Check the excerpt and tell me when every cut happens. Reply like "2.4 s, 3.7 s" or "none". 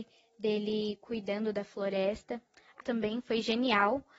2.8 s